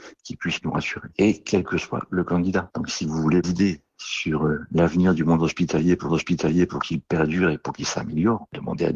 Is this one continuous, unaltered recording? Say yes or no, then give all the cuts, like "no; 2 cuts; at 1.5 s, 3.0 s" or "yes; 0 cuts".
no; 2 cuts; at 3.4 s, 6.1 s